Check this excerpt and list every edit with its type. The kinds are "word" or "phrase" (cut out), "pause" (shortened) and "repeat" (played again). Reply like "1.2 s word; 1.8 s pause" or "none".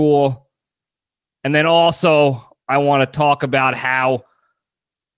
none